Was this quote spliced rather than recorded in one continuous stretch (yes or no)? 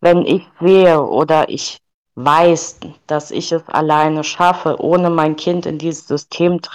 yes